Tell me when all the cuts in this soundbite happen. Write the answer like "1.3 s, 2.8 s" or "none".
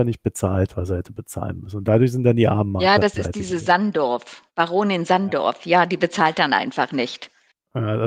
4.5 s